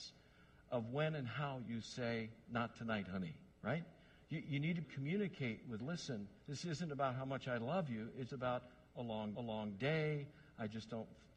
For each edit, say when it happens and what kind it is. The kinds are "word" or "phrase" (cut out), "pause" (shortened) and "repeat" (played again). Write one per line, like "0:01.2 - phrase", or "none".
0:03.5 - pause
0:04.8 - phrase
0:05.8 - phrase
0:06.4 - pause
0:08.3 - word
0:09.3 - repeat